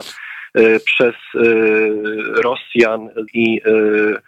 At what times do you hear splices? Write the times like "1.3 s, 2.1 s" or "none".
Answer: 3.3 s

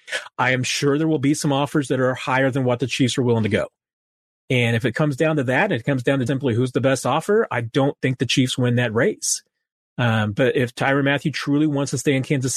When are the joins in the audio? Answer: 6.3 s

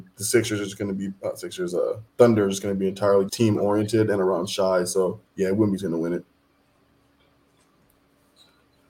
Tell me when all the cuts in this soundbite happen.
2.1 s, 3.3 s, 5.3 s

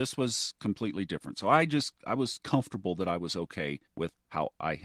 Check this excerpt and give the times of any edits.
3.8 s

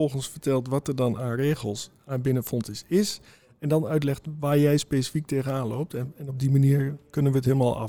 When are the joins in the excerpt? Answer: none

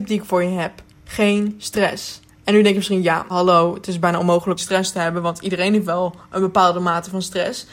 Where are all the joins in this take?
3.3 s, 4.6 s

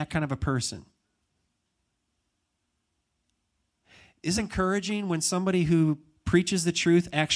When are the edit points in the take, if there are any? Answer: 4.4 s

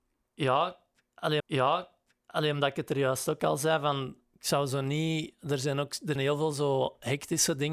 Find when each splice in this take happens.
1.4 s, 4.2 s, 6.2 s

